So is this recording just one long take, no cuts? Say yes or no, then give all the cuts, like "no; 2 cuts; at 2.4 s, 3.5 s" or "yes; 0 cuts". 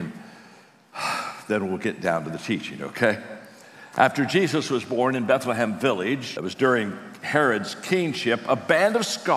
no; 1 cut; at 6.4 s